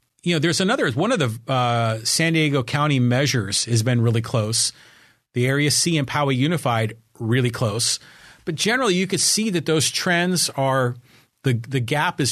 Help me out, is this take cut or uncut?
uncut